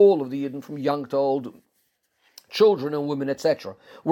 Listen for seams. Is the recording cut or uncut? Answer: uncut